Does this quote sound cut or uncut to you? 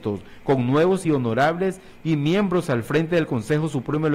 uncut